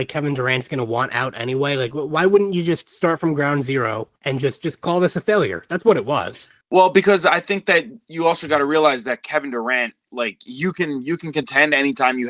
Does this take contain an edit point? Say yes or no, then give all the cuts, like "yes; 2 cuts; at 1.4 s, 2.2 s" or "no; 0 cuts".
yes; 2 cuts; at 4.2 s, 6.6 s